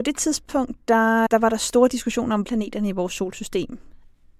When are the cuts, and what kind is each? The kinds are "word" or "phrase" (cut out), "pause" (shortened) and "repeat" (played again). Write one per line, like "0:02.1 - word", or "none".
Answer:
0:01.3 - word
0:02.4 - word